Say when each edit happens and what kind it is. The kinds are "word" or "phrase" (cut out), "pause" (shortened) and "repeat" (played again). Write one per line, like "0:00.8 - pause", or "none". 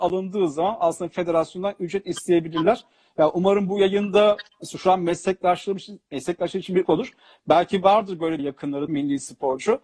0:06.1 - pause
0:06.8 - word
0:08.4 - phrase
0:08.9 - word